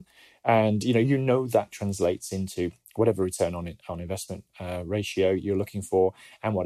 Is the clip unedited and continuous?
yes; 0 cuts

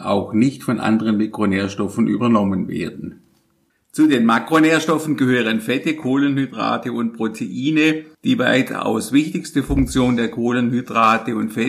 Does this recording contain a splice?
no; 0 cuts

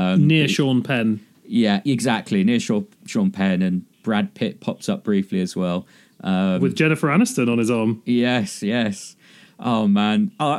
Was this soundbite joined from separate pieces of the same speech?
yes; 1 cut; at 3.9 s

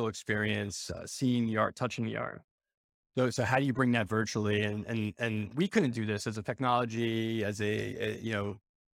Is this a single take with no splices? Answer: yes; 0 cuts

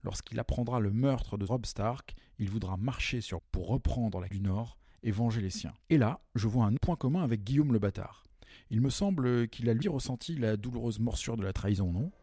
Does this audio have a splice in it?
yes; 6 cuts; at 1.5 s, 3.4 s, 4.3 s, 5.8 s, 6.8 s, 9.8 s

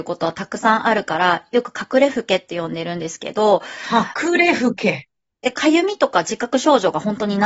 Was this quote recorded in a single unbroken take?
yes; 0 cuts

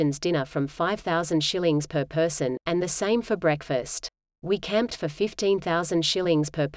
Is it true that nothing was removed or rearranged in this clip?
no; 1 cut; at 4.2 s

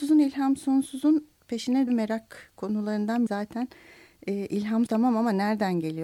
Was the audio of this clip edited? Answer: yes; 3 cuts; at 1.9 s, 3.3 s, 4.9 s

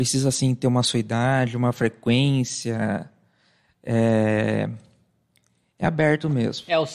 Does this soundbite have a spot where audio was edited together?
no; 0 cuts

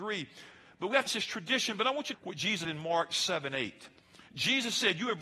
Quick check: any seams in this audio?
yes; 3 cuts; at 1.1 s, 2.1 s, 2.6 s

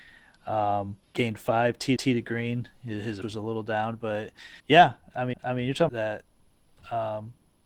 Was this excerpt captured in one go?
no; 6 cuts; at 1.0 s, 2.0 s, 3.2 s, 4.6 s, 5.3 s, 5.9 s

